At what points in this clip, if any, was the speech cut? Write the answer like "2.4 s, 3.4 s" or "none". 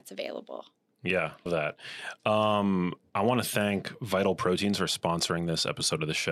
1.5 s